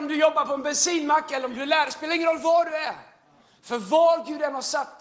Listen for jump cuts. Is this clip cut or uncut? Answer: uncut